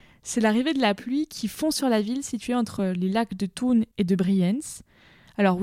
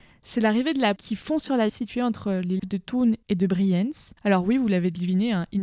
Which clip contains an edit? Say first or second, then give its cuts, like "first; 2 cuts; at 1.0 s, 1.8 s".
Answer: second; 4 cuts; at 1.0 s, 1.7 s, 2.6 s, 4.2 s